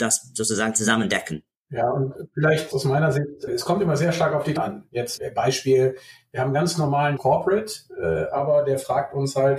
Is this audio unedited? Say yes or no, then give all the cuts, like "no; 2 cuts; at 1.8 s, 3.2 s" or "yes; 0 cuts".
no; 5 cuts; at 2.7 s, 3.5 s, 4.6 s, 5.2 s, 7.2 s